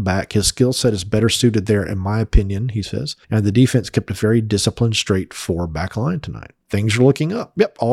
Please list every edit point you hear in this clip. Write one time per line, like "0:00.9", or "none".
0:03.2
0:06.6